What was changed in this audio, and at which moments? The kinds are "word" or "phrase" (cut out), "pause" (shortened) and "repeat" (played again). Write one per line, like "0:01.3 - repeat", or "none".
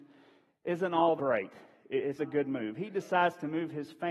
0:01.2 - word
0:02.2 - word